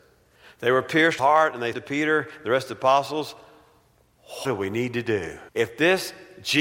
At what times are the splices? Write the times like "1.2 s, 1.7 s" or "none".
1.2 s, 1.7 s, 4.4 s, 5.5 s